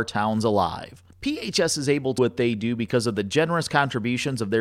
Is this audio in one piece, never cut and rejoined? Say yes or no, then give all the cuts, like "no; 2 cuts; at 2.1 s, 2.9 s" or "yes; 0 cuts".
no; 2 cuts; at 1.1 s, 2.2 s